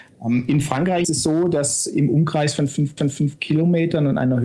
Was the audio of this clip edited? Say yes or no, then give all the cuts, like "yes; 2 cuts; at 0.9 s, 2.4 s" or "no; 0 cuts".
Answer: yes; 2 cuts; at 1.0 s, 3.0 s